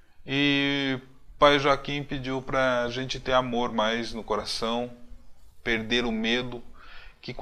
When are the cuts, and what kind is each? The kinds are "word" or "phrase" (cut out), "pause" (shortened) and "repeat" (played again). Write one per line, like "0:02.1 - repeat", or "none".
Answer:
none